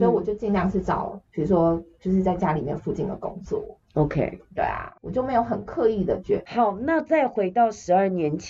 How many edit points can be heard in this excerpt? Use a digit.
1